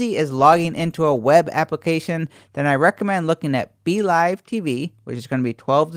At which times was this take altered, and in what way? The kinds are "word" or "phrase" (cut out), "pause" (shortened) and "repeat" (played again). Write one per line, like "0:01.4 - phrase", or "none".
none